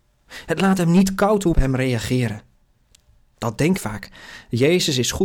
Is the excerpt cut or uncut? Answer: cut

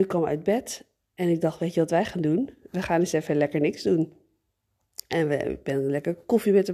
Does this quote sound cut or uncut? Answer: uncut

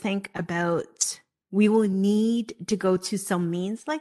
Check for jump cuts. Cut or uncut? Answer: uncut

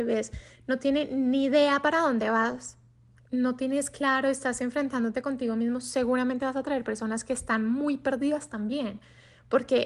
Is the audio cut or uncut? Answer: uncut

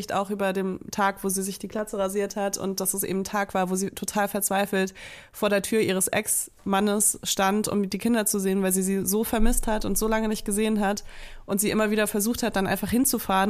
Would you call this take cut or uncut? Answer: uncut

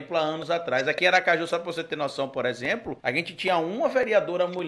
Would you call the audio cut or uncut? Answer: cut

